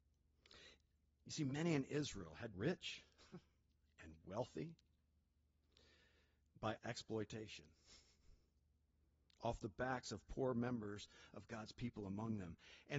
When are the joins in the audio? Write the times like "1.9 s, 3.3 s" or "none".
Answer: 2.5 s, 6.8 s